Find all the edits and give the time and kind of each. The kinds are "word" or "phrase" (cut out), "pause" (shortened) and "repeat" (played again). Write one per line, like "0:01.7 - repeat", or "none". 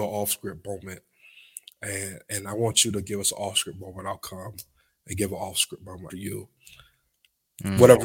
0:06.1 - word